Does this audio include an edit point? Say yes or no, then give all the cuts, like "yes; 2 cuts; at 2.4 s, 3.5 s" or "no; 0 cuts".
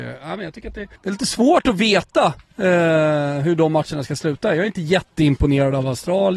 yes; 1 cut; at 1.0 s